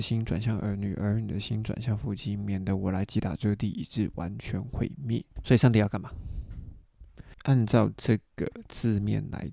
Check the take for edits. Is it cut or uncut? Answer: cut